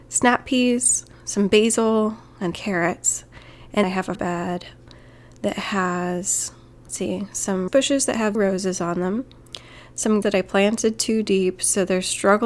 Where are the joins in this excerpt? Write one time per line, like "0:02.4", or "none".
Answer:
0:01.1
0:02.5
0:03.8
0:04.1
0:06.7
0:07.7
0:08.3
0:10.2